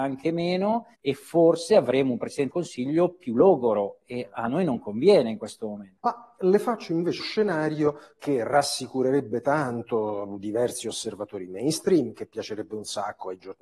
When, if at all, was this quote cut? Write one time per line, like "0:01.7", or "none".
0:00.9
0:02.5
0:06.0
0:07.2